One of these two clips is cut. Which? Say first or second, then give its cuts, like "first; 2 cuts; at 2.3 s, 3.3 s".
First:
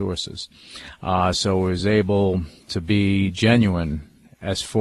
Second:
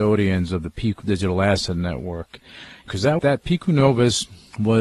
second; 3 cuts; at 1.0 s, 2.9 s, 3.2 s